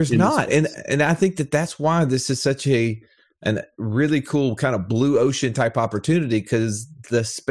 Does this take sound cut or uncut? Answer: uncut